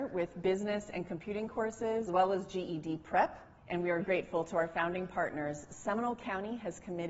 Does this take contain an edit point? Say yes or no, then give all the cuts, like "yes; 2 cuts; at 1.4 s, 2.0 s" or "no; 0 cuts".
yes; 3 cuts; at 2.1 s, 3.6 s, 4.0 s